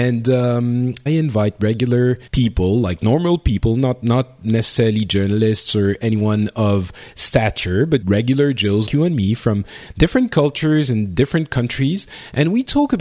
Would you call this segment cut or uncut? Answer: cut